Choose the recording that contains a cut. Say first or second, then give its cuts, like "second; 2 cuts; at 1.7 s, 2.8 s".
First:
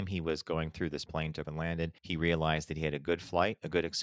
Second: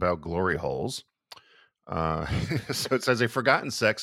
first; 3 cuts; at 1.1 s, 1.4 s, 2.0 s